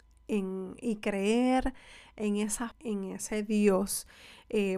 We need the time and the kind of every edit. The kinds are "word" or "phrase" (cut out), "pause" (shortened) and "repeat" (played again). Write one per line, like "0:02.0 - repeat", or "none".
0:02.7 - word